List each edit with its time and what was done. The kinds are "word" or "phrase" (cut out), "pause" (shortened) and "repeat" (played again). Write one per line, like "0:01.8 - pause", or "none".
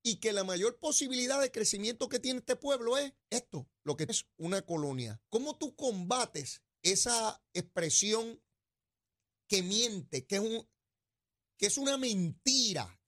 0:03.2 - pause
0:04.1 - phrase
0:05.3 - pause
0:06.7 - pause
0:10.3 - word